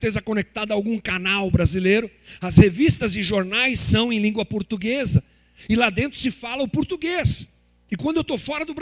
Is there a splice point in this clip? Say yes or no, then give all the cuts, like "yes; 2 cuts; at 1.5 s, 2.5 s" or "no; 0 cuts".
no; 0 cuts